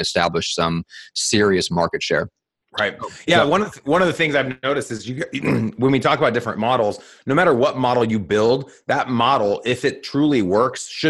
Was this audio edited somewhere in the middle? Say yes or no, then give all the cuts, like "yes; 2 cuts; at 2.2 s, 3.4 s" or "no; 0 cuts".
no; 0 cuts